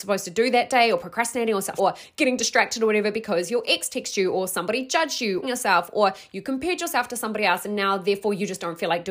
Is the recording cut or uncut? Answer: cut